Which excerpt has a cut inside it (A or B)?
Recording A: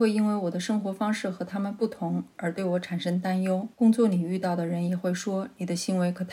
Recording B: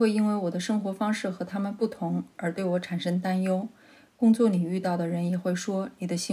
A